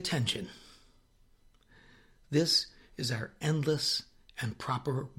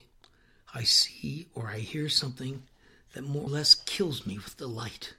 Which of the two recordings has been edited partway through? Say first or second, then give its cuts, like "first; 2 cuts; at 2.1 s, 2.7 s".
second; 1 cut; at 3.5 s